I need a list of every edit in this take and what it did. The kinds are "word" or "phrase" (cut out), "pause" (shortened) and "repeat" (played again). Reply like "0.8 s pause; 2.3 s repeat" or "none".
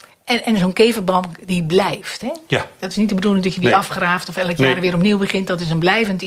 none